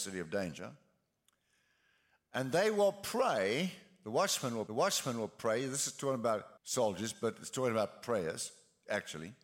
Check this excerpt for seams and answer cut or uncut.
cut